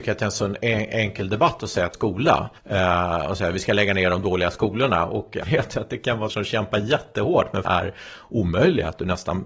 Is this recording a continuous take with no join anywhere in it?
no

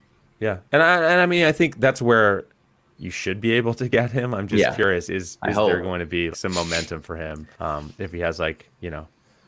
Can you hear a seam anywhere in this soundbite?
yes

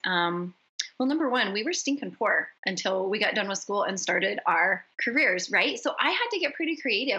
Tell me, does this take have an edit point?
yes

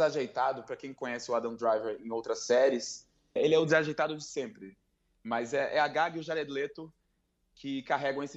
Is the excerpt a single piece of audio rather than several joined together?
no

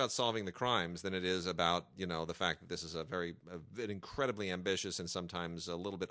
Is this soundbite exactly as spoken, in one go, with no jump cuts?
yes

